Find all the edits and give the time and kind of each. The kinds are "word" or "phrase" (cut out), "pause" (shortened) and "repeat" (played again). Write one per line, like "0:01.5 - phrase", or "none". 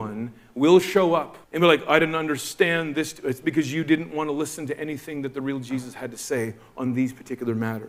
0:01.4 - pause